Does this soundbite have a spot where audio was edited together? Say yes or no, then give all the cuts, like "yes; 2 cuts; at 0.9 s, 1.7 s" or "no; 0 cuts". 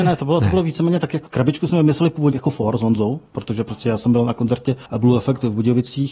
yes; 3 cuts; at 1.3 s, 2.3 s, 4.9 s